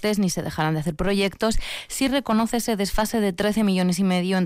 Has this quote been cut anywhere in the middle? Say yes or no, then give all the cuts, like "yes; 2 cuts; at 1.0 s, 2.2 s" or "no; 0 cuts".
no; 0 cuts